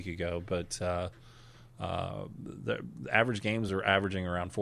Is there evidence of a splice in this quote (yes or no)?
no